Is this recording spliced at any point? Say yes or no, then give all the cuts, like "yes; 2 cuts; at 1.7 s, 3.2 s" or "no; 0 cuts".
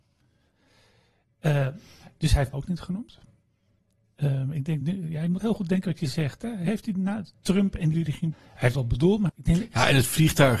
yes; 7 cuts; at 2.5 s, 4.8 s, 5.4 s, 7.9 s, 8.3 s, 8.7 s, 9.3 s